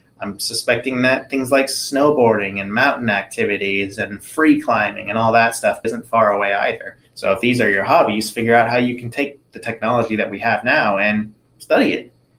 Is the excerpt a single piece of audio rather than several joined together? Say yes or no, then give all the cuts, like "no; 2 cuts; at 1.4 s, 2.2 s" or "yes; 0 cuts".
no; 2 cuts; at 5.8 s, 7.0 s